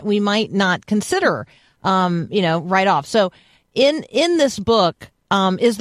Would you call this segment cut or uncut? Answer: uncut